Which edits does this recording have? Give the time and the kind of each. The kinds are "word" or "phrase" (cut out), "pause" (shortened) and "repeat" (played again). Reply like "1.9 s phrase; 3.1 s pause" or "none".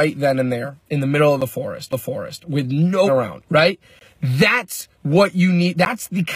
1.9 s repeat; 3.1 s word; 3.5 s pause; 4.9 s pause